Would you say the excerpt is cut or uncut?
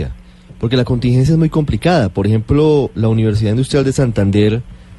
uncut